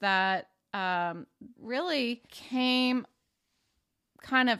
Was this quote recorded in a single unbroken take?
no; 2 cuts; at 1.6 s, 2.3 s

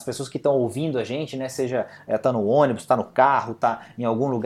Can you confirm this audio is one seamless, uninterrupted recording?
yes; 0 cuts

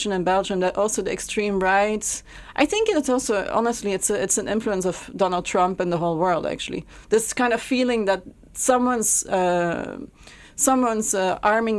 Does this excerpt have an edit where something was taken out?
no; 0 cuts

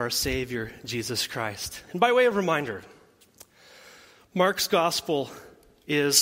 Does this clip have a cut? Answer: no; 0 cuts

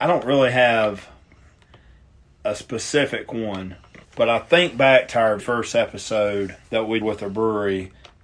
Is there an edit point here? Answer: yes; 4 cuts; at 4.0 s, 5.4 s, 6.6 s, 7.0 s

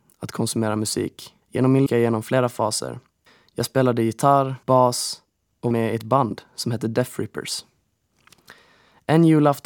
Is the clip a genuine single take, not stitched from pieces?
no; 5 cuts; at 1.4 s, 1.9 s, 3.3 s, 4.6 s, 5.7 s

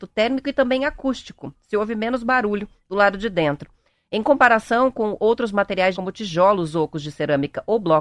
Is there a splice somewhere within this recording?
yes; 1 cut; at 5.9 s

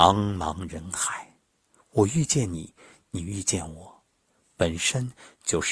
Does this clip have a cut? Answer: no; 0 cuts

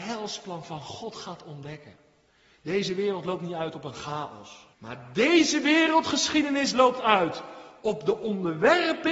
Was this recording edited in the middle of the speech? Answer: yes; 1 cut; at 4.7 s

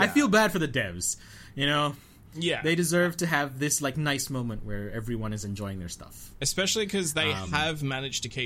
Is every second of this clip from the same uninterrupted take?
yes; 0 cuts

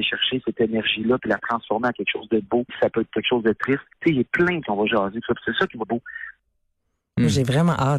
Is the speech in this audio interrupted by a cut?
yes; 4 cuts; at 2.7 s, 4.6 s, 5.2 s, 5.8 s

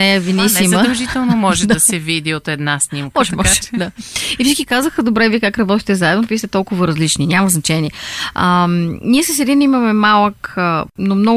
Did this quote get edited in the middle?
no; 0 cuts

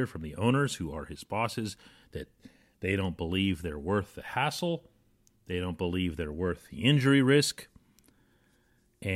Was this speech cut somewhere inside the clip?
no; 0 cuts

